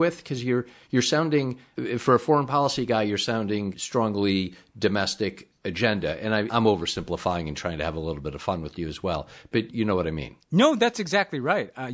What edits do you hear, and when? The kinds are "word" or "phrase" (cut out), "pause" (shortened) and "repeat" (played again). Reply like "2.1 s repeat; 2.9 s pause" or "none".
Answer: 6.5 s word